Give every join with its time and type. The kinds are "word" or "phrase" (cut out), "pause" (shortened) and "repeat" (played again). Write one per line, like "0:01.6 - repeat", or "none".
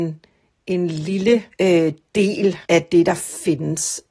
0:01.5 - pause
0:02.6 - pause